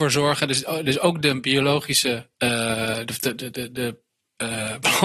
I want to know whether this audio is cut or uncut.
uncut